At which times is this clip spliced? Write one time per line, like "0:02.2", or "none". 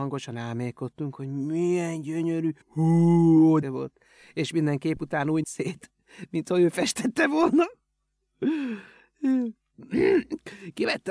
0:02.6
0:03.6
0:05.4